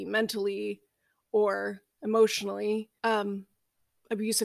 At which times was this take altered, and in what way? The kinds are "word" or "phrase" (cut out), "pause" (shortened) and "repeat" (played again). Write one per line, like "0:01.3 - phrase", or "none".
0:03.0 - pause

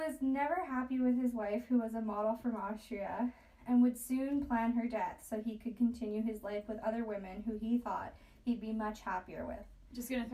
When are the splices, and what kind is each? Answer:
none

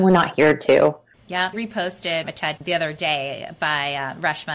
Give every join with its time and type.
0:01.5 - word
0:02.6 - word

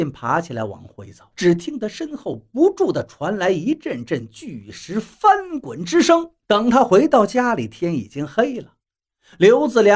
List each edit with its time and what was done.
0:01.3 - pause
0:06.4 - pause

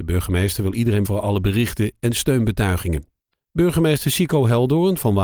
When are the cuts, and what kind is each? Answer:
0:01.0 - word
0:03.3 - pause

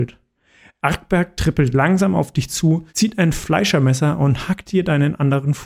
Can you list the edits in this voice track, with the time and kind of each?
0:02.9 - pause

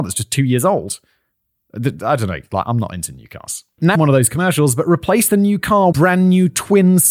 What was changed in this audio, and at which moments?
0:03.9 - word
0:05.9 - word

